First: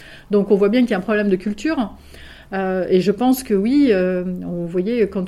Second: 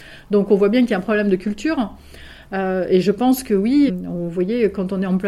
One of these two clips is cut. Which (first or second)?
second